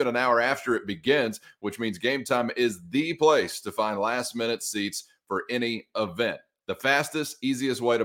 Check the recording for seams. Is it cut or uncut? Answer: uncut